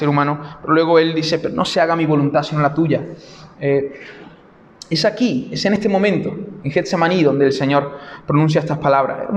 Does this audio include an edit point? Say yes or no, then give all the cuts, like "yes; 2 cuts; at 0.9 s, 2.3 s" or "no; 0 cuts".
no; 0 cuts